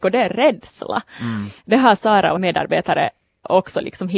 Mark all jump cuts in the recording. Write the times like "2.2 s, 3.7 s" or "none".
1.6 s, 2.4 s

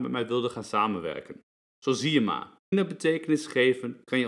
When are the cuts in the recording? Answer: 1.5 s, 2.7 s

